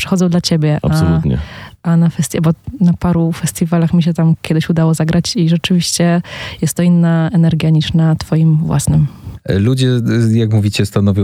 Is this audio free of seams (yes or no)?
yes